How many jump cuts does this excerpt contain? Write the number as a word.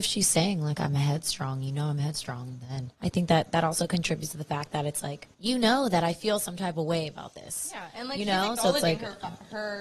two